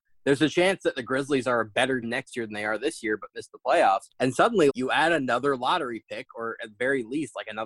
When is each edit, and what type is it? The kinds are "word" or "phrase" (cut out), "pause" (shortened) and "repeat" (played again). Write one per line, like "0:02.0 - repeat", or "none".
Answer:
0:02.0 - word
0:04.1 - pause
0:04.7 - word